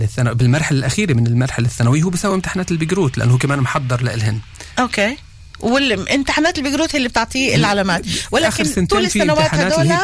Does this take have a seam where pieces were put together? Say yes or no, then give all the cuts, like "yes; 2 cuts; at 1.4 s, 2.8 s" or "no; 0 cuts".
no; 0 cuts